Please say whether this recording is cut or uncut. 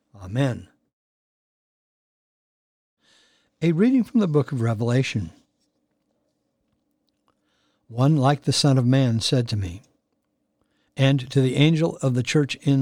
uncut